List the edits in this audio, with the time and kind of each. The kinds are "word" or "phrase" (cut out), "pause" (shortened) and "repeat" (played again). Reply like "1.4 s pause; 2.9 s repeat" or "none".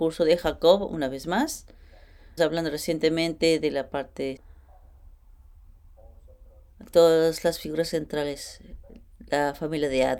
2.4 s word; 4.4 s word